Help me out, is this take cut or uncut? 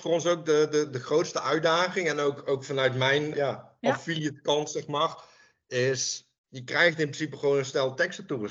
cut